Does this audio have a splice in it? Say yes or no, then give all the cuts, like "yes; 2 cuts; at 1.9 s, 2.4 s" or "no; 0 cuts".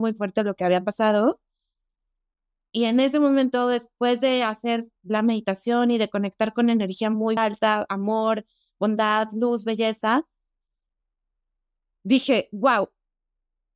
yes; 1 cut; at 7.4 s